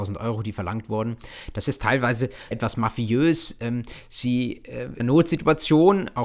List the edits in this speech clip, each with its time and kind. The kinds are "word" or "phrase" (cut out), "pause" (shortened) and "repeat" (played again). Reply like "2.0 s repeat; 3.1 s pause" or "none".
2.5 s word; 5.0 s phrase